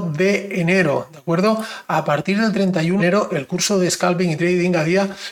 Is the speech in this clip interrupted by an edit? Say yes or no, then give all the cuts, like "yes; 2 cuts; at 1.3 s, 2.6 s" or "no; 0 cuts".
yes; 1 cut; at 3.0 s